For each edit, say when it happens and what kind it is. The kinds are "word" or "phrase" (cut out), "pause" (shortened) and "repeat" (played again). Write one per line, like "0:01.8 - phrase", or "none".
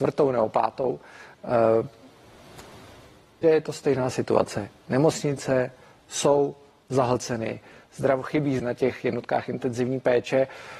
0:03.4 - word
0:08.6 - word